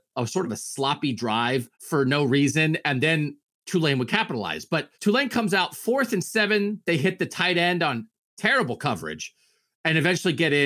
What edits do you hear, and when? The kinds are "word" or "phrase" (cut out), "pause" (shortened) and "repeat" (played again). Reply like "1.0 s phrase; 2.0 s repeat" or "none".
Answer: 1.7 s pause; 4.9 s pause